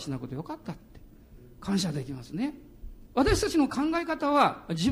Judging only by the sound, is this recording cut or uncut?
cut